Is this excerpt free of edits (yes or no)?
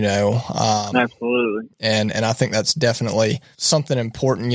yes